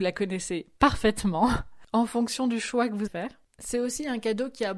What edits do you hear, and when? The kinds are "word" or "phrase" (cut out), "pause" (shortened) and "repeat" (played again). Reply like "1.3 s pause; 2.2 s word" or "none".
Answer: 3.1 s word